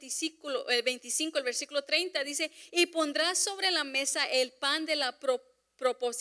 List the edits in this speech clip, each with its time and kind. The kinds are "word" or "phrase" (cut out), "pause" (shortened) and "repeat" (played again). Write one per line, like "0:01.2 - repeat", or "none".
none